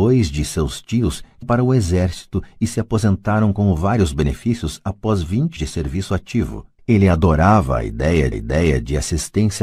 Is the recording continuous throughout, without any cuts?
no; 4 cuts; at 1.4 s, 5.6 s, 6.8 s, 8.3 s

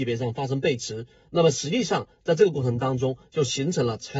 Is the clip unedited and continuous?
yes; 0 cuts

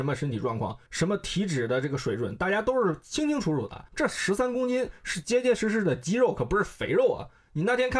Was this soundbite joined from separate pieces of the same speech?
yes; 1 cut; at 3.9 s

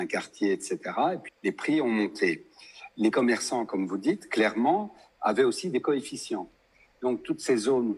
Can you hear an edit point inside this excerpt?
yes; 3 cuts; at 1.3 s, 3.1 s, 5.8 s

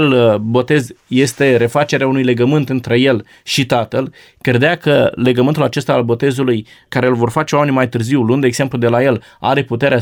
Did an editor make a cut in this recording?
no; 0 cuts

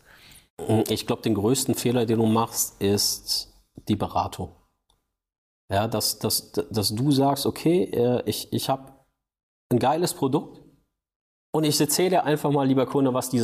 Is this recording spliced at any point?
no; 0 cuts

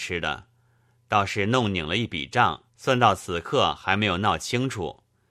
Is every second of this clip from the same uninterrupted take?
no; 1 cut; at 2.7 s

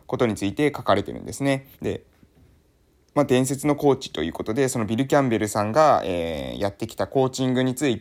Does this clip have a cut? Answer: yes; 1 cut; at 1.7 s

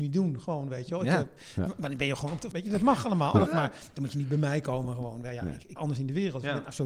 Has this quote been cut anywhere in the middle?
yes; 3 cuts; at 2.5 s, 3.5 s, 5.8 s

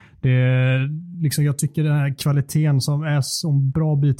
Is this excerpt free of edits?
yes; 0 cuts

